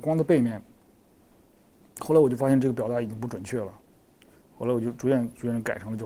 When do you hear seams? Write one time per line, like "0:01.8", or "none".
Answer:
none

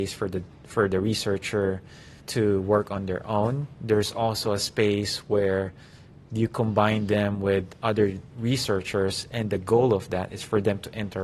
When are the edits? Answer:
0:02.2

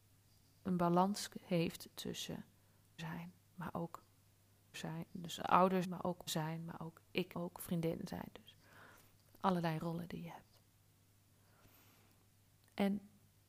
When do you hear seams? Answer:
0:03.0
0:04.7
0:05.8
0:06.3
0:07.3

